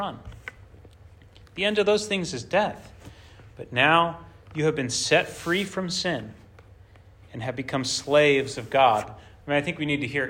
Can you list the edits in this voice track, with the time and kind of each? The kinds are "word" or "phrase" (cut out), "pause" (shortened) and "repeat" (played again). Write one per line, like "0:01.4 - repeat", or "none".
none